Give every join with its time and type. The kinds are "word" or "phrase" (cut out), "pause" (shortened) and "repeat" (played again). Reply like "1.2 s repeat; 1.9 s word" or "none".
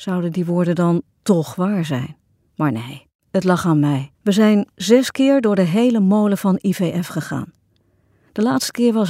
2.3 s pause; 3.2 s pause; 4.1 s pause; 4.7 s pause